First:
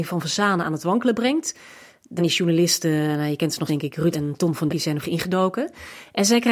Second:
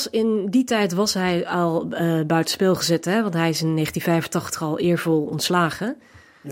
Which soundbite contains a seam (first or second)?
first